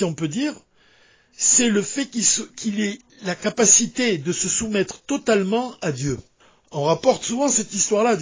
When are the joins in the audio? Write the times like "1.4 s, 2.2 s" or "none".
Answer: 6.4 s